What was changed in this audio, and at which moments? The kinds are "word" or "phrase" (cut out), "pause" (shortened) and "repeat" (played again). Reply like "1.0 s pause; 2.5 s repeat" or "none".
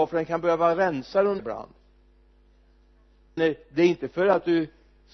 1.4 s phrase; 3.4 s word